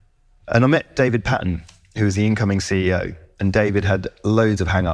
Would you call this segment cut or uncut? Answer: uncut